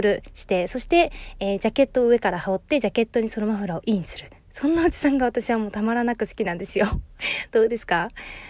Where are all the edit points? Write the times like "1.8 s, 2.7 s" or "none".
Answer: none